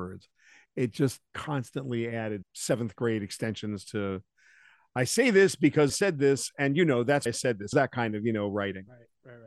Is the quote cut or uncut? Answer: cut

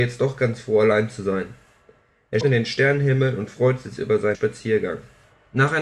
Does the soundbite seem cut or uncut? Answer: cut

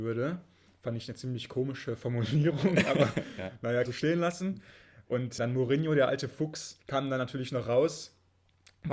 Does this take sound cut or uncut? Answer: cut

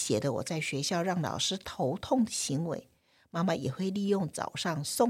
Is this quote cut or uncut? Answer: uncut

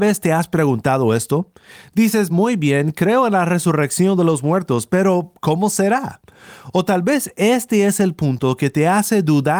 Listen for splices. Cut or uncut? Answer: uncut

